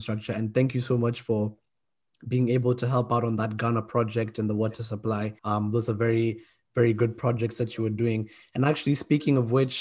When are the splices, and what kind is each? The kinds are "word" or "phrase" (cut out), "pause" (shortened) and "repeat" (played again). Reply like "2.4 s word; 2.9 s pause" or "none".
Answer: 5.4 s pause